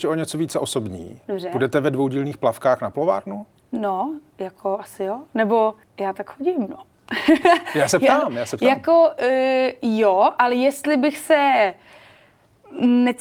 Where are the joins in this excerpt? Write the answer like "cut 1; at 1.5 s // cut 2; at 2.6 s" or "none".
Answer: cut 1; at 3.5 s // cut 2; at 5.8 s